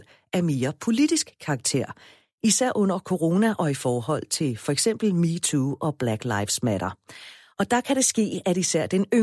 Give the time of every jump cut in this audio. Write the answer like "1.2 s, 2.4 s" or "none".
none